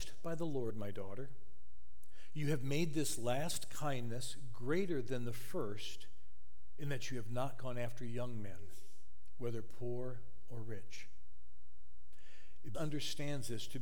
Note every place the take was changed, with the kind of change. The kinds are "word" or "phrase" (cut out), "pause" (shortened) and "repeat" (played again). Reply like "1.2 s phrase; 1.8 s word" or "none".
12.7 s word